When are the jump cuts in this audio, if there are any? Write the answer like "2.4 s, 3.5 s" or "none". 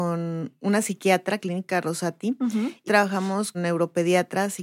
1.4 s, 2.9 s, 3.5 s